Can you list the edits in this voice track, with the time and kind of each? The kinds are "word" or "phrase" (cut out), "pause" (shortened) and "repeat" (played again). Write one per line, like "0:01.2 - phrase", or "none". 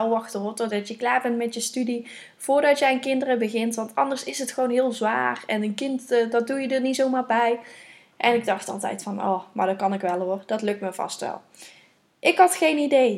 none